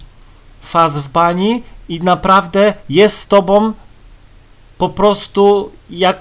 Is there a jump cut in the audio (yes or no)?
no